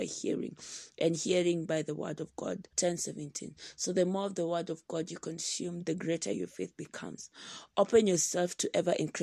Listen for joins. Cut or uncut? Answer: cut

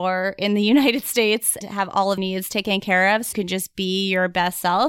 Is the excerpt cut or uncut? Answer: cut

